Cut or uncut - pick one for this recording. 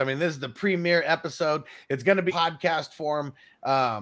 cut